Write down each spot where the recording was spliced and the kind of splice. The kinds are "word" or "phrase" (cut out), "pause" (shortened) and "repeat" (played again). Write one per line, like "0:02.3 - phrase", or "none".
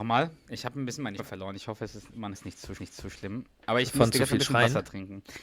0:01.2 - word
0:02.3 - word
0:02.8 - repeat